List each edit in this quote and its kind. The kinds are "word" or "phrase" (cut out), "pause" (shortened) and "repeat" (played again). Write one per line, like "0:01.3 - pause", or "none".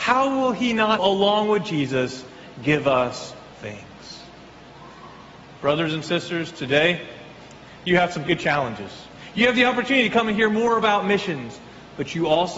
0:01.0 - word
0:03.5 - word
0:08.2 - word